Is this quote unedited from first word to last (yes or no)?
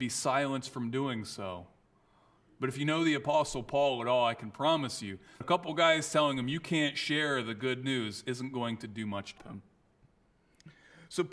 no